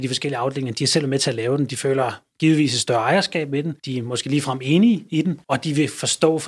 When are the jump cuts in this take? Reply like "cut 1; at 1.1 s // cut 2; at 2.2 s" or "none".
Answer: cut 1; at 3.8 s // cut 2; at 5.4 s

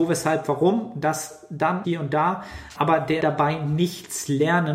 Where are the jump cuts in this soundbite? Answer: cut 1; at 1.8 s // cut 2; at 2.7 s // cut 3; at 3.2 s

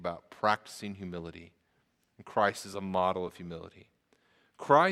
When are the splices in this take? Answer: none

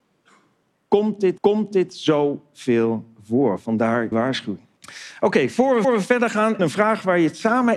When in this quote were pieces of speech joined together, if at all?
cut 1; at 1.4 s // cut 2; at 4.1 s // cut 3; at 4.8 s // cut 4; at 5.8 s // cut 5; at 6.6 s

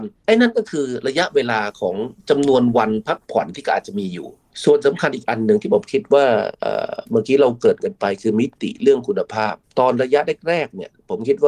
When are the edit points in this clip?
none

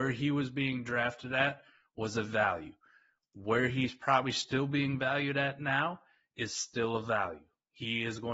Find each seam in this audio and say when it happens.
none

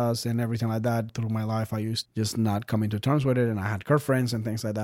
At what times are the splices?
cut 1; at 1.1 s // cut 2; at 2.0 s

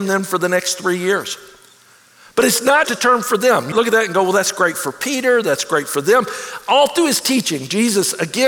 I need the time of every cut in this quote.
cut 1; at 2.8 s // cut 2; at 3.7 s

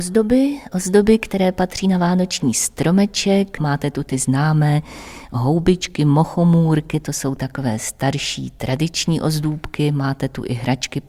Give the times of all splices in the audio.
none

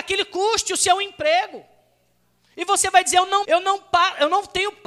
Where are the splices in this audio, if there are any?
cut 1; at 3.4 s

